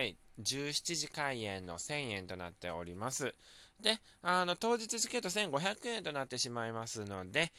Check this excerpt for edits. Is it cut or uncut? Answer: uncut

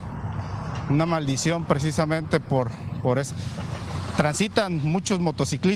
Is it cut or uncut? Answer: uncut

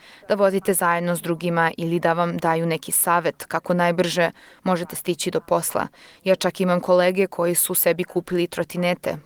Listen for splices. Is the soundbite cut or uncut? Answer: uncut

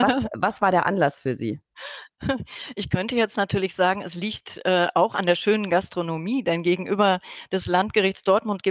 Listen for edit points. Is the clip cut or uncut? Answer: uncut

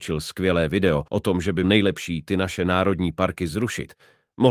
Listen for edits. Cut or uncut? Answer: cut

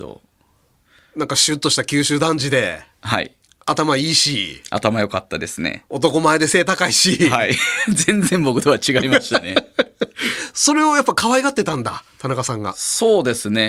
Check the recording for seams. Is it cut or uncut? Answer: cut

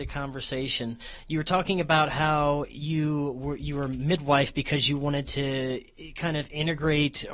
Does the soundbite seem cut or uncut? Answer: uncut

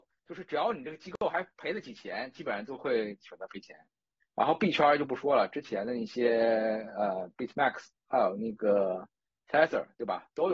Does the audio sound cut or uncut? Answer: uncut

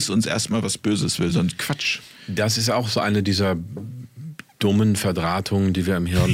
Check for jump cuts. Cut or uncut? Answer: uncut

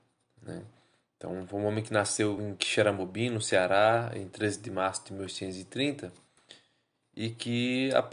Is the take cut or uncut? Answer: uncut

